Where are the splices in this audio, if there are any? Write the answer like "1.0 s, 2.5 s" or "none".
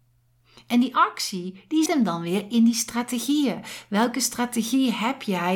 1.9 s